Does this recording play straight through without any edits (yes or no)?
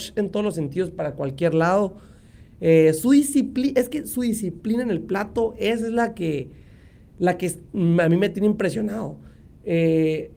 yes